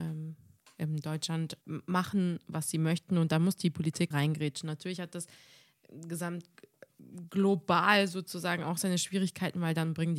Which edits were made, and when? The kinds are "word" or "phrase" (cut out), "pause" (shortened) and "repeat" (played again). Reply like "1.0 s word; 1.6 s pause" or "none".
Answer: 1.6 s word; 4.1 s word